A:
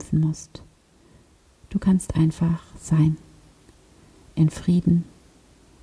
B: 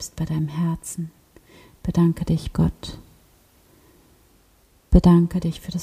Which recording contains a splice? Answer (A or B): B